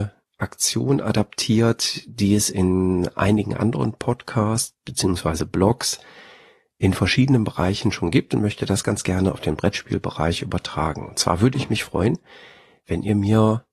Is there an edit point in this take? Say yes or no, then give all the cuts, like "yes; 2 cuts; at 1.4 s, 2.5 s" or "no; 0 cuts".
no; 0 cuts